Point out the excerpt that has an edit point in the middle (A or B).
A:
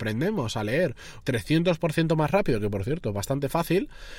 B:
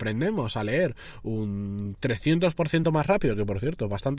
A